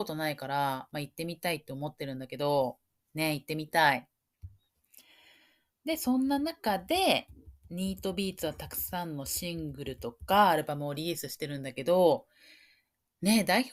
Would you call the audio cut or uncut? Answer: uncut